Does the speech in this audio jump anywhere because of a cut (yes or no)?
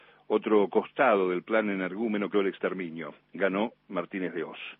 yes